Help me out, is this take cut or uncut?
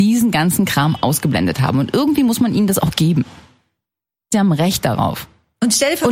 cut